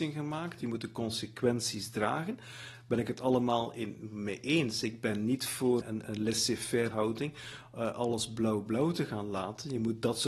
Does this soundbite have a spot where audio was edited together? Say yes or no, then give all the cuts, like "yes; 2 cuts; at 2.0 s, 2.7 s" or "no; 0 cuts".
yes; 2 cuts; at 5.8 s, 6.9 s